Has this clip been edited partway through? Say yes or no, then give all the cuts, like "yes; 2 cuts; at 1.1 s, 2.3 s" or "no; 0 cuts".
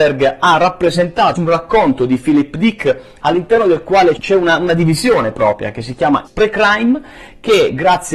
yes; 3 cuts; at 1.4 s, 4.2 s, 6.3 s